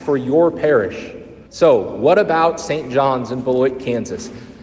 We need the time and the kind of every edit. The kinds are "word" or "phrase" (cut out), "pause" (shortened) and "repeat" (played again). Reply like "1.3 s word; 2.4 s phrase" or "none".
1.5 s pause